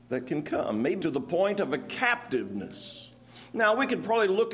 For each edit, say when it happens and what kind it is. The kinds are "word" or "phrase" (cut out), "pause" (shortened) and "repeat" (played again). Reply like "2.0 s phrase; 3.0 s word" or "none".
1.0 s word